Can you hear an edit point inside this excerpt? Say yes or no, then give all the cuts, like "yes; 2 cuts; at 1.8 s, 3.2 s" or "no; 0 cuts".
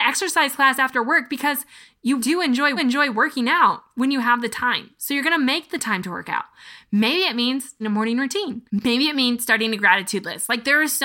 yes; 4 cuts; at 2.2 s, 2.8 s, 7.8 s, 8.7 s